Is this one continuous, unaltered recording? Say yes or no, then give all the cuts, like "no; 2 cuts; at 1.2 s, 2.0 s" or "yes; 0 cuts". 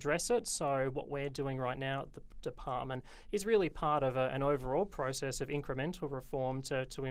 yes; 0 cuts